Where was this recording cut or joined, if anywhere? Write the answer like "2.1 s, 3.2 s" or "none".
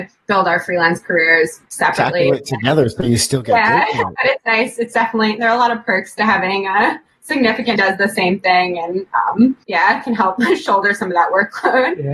1.6 s, 7.8 s, 9.6 s